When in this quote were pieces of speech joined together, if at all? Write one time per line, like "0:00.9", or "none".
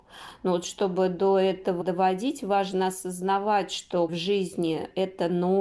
0:01.8
0:04.1